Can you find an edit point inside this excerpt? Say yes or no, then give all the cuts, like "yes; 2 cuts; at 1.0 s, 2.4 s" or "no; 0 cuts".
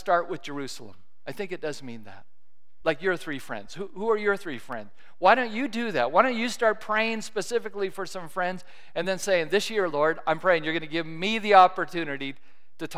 no; 0 cuts